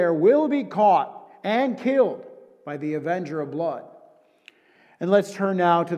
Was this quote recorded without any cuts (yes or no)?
yes